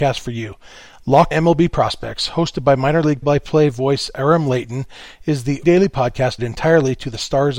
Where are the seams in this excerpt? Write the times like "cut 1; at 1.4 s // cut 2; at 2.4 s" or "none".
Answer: cut 1; at 1.3 s // cut 2; at 3.2 s // cut 3; at 5.6 s // cut 4; at 6.4 s